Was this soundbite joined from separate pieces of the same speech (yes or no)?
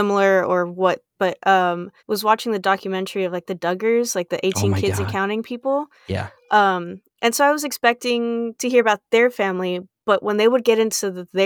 yes